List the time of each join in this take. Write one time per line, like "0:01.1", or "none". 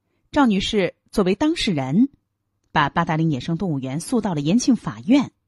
none